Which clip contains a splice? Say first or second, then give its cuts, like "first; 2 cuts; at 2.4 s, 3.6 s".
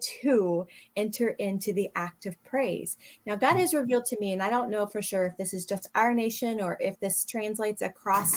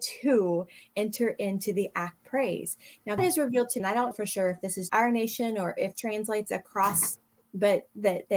second; 7 cuts; at 2.2 s, 3.2 s, 3.8 s, 4.1 s, 4.9 s, 6.0 s, 7.4 s